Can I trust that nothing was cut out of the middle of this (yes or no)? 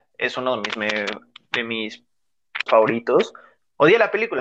no